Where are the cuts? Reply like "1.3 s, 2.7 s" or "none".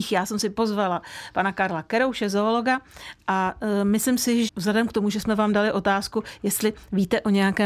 4.5 s